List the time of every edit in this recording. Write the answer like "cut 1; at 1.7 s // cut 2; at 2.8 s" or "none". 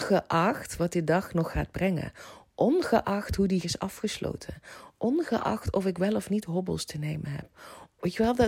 cut 1; at 3.6 s